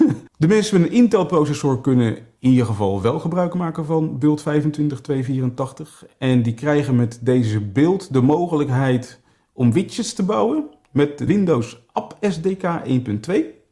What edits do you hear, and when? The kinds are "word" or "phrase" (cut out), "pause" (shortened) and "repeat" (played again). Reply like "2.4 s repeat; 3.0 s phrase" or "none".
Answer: 11.3 s word